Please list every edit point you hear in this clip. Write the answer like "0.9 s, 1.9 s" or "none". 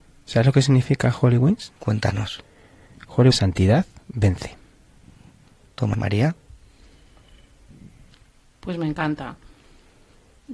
1.8 s, 3.3 s, 5.9 s